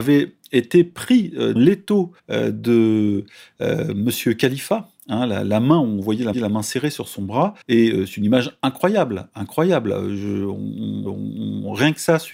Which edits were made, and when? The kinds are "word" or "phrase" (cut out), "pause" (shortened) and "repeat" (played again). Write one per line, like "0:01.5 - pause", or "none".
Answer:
0:01.6 - word
0:02.2 - pause
0:06.3 - repeat
0:07.6 - pause
0:11.1 - repeat